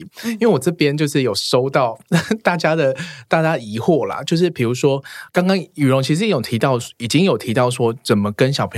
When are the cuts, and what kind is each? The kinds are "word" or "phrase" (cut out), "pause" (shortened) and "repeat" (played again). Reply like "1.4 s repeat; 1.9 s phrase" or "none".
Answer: 5.3 s word

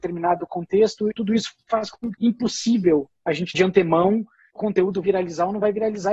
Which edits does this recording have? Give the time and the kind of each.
1.1 s word; 2.1 s word; 3.5 s word; 4.6 s word; 5.0 s word

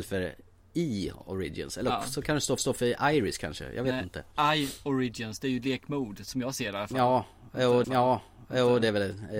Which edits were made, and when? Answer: 2.6 s repeat; 7.8 s repeat

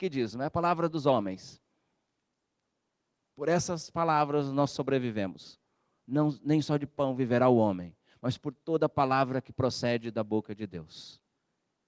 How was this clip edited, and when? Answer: none

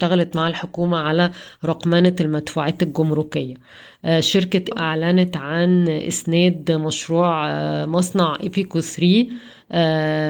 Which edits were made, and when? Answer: 4.7 s word

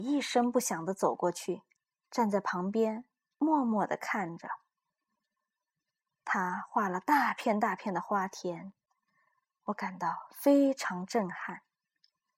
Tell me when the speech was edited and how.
1.8 s pause

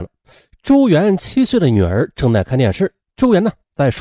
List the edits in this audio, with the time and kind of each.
3.1 s pause

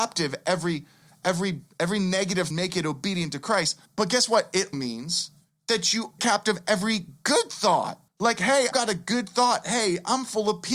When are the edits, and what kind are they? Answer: 2.5 s phrase; 3.9 s pause; 4.7 s word; 6.2 s word; 8.1 s word; 8.7 s word

